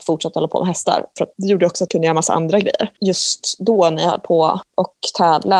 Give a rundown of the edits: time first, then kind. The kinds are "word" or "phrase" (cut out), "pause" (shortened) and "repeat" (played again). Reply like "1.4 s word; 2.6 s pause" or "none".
1.9 s word